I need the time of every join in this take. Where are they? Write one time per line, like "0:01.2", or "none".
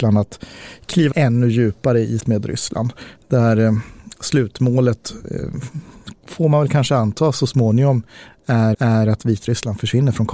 0:01.1
0:02.2
0:08.7